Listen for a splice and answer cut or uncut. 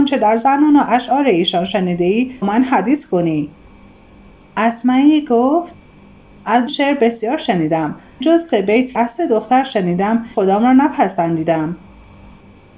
cut